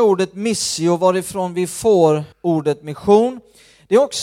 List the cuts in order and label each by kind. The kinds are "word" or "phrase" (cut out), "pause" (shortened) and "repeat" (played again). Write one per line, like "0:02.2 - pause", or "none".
0:02.3 - pause